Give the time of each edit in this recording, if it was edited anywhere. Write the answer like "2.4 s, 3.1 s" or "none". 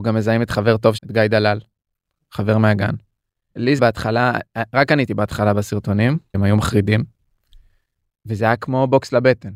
1.0 s, 3.8 s, 5.1 s, 6.3 s